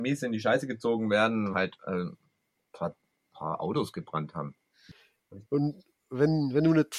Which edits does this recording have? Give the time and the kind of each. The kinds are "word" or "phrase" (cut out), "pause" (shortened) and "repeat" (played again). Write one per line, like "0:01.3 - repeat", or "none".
0:01.5 - word
0:05.5 - pause

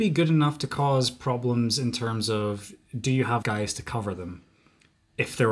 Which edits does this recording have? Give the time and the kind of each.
0:03.4 - word

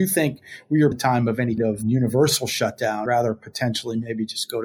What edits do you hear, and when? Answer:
0:00.9 - word
0:01.6 - word
0:03.1 - word

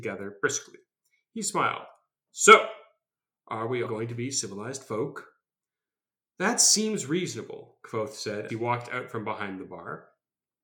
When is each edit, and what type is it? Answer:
0:03.8 - word
0:08.5 - word

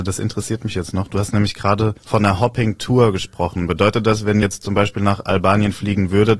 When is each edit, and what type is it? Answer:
0:02.0 - pause
0:04.4 - word

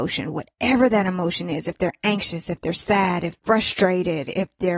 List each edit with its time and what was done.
0:03.4 - word

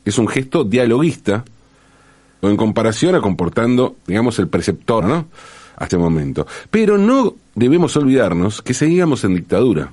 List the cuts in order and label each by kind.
0:02.4 - word
0:03.2 - phrase
0:04.0 - pause
0:05.0 - word
0:05.9 - word

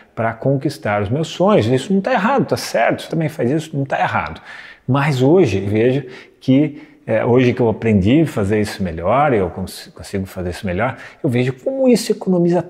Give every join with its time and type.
0:03.1 - word
0:05.7 - word

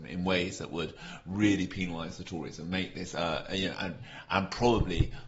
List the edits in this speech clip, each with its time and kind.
none

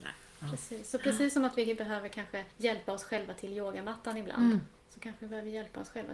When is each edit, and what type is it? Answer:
0:02.5 - pause
0:04.8 - pause

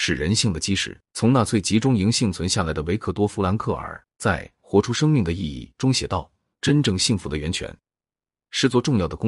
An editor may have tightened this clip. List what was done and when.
0:01.0 - pause

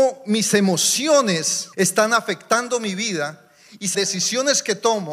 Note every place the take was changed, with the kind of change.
0:01.7 - pause
0:03.9 - word

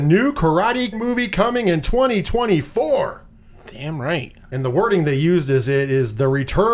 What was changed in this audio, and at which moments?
0:00.9 - word

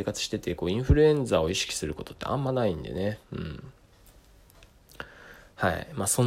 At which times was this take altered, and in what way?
none

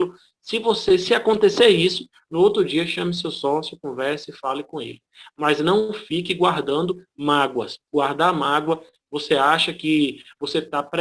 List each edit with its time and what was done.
none

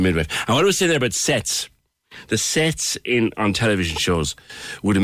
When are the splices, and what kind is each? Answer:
none

